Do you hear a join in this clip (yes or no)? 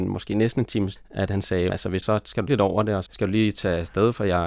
yes